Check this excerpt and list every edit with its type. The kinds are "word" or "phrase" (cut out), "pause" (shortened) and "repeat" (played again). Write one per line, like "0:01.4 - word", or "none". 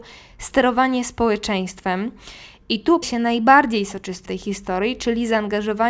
0:03.0 - word
0:04.3 - word